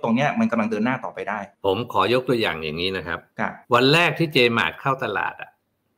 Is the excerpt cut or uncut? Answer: cut